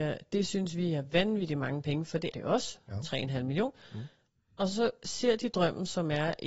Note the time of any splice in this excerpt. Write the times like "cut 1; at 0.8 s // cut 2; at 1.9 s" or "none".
cut 1; at 2.3 s